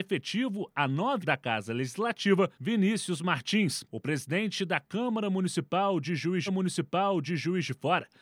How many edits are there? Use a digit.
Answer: 4